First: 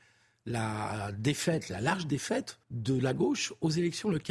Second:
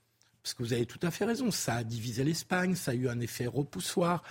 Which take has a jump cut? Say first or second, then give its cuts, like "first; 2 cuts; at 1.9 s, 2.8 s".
first; 1 cut; at 2.6 s